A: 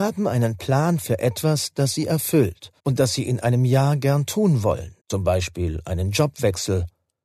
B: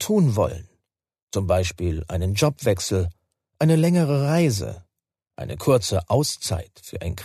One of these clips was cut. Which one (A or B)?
A